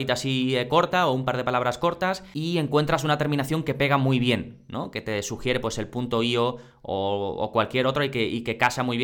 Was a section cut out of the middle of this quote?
no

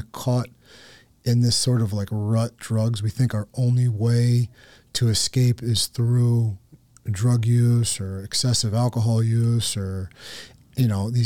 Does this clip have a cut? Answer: yes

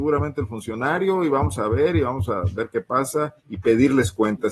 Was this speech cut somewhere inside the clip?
yes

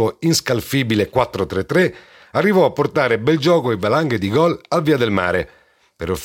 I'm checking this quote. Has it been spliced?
no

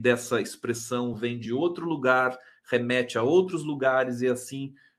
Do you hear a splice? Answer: no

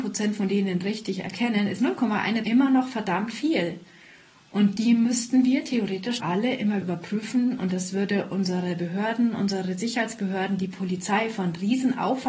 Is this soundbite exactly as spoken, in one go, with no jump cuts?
no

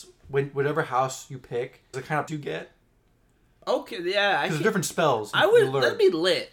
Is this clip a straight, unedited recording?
no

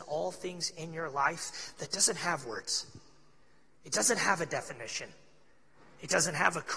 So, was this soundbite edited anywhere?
no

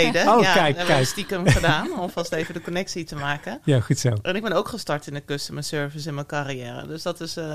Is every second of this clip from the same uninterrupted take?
yes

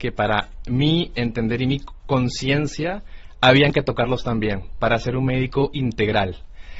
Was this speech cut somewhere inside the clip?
no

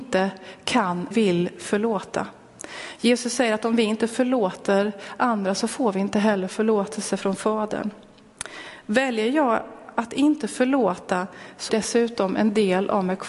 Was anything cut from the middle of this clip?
yes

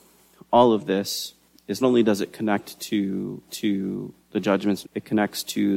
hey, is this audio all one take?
no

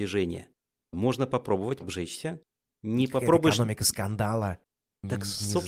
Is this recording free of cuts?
no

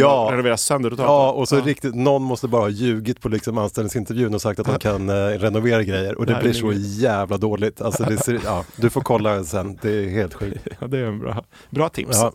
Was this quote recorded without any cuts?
yes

